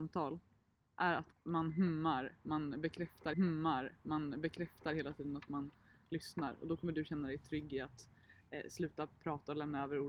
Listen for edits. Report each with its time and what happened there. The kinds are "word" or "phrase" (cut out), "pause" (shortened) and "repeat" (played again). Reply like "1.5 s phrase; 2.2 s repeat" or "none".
1.3 s word; 3.3 s repeat